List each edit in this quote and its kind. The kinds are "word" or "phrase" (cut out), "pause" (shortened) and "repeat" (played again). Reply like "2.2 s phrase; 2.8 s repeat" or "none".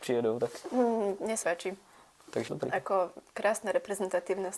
1.4 s word; 2.5 s word; 3.3 s pause